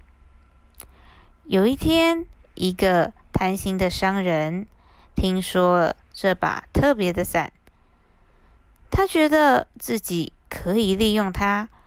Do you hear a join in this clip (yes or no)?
yes